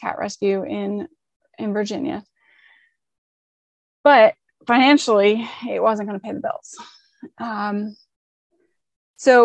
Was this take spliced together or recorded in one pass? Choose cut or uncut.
uncut